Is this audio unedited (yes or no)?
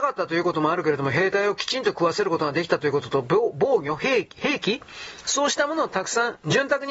yes